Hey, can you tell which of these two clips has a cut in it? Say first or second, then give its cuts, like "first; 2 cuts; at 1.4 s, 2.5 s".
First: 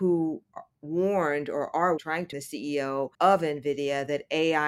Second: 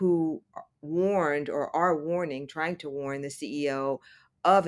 first; 3 cuts; at 2.0 s, 2.3 s, 3.1 s